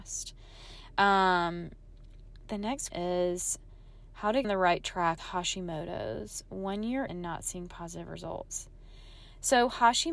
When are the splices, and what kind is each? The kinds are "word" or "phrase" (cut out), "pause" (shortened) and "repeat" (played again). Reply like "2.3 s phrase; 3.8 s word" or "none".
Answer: 2.9 s word; 4.4 s word; 5.2 s word; 7.1 s word